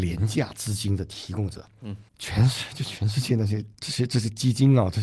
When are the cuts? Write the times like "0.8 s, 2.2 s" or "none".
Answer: 2.1 s, 3.7 s

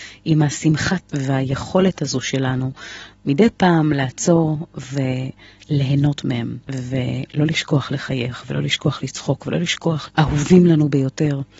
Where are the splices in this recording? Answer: 1.0 s, 6.6 s, 10.1 s

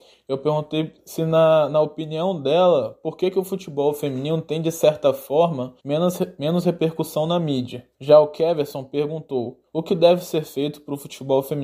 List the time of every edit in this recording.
5.8 s, 7.9 s, 9.7 s

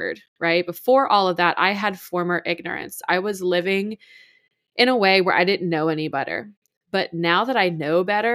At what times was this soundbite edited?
none

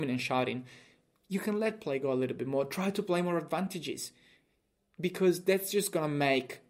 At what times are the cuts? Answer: none

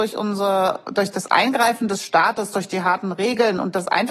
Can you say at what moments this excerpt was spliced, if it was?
none

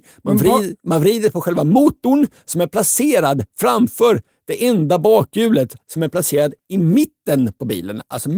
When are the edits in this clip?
none

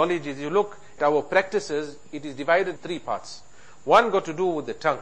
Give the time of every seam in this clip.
1.0 s, 2.8 s

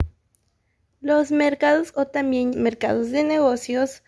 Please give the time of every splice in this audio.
1.9 s, 2.5 s

